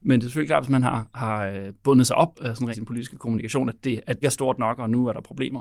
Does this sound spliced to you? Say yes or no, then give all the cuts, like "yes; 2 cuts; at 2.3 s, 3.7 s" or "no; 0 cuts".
yes; 3 cuts; at 2.3 s, 2.7 s, 4.2 s